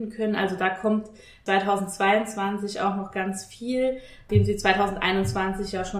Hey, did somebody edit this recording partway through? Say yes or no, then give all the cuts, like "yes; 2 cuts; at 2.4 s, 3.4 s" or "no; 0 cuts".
no; 0 cuts